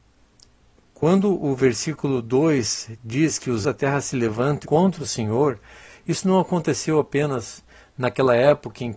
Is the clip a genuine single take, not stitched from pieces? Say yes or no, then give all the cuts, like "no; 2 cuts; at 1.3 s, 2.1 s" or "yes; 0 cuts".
no; 2 cuts; at 3.6 s, 4.6 s